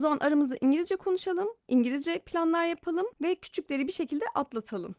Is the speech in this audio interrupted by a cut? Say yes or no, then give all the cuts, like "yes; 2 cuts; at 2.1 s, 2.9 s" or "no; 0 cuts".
yes; 1 cut; at 3.1 s